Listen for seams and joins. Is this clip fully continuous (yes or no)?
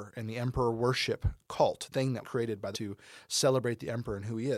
no